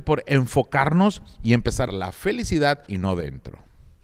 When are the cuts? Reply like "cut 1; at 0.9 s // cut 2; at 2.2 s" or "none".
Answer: cut 1; at 1.9 s // cut 2; at 2.9 s